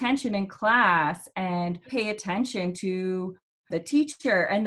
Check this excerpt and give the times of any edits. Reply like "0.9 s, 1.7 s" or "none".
1.9 s, 3.7 s